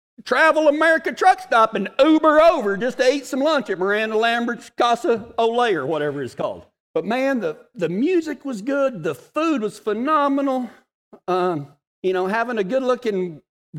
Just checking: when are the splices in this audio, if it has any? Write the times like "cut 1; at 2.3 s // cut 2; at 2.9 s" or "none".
none